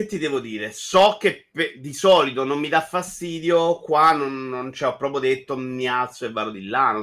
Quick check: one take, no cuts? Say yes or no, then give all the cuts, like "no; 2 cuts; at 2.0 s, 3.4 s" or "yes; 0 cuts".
yes; 0 cuts